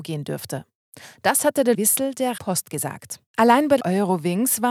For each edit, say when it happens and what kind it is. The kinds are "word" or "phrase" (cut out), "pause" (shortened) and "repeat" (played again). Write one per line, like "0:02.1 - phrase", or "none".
0:01.7 - phrase
0:02.4 - word
0:03.3 - pause
0:03.8 - word